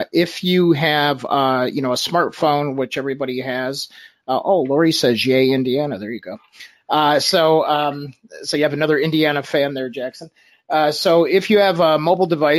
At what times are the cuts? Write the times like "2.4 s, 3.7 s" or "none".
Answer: none